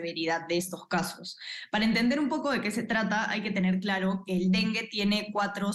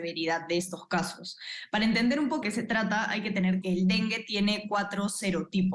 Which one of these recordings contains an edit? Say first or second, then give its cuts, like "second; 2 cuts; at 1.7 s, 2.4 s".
second; 2 cuts; at 2.4 s, 3.6 s